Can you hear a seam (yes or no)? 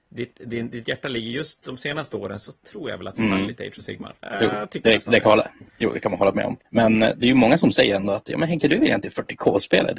yes